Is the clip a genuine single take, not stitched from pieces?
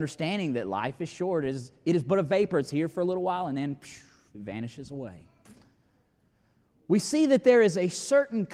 yes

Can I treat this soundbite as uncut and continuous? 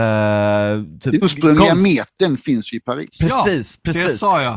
no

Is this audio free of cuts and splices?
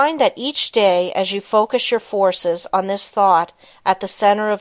yes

